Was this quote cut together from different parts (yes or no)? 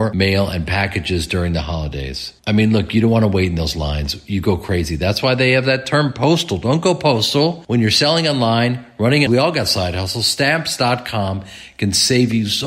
yes